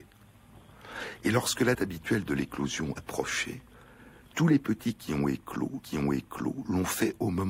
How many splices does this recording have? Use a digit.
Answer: 3